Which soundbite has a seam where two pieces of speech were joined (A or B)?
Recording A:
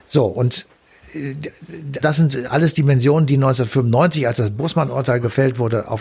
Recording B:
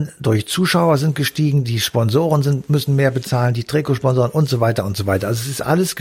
A